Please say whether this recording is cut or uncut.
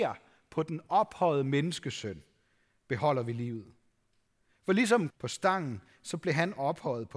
cut